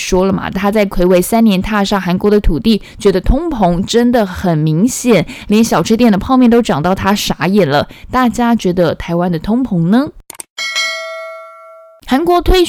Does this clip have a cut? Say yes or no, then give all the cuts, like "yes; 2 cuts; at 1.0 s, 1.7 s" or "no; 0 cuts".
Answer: no; 0 cuts